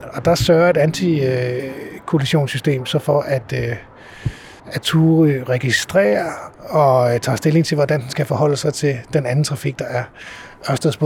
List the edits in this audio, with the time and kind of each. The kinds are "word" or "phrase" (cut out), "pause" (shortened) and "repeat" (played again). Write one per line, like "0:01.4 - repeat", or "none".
0:04.6 - pause
0:06.5 - pause